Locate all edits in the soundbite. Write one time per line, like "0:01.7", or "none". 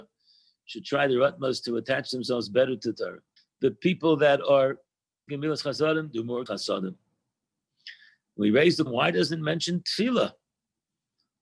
0:03.4
0:05.3
0:06.5
0:08.9